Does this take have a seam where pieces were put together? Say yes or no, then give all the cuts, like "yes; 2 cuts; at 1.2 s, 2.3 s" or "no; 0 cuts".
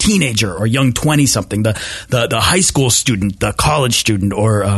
no; 0 cuts